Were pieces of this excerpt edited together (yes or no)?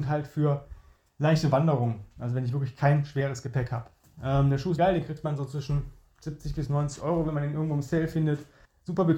yes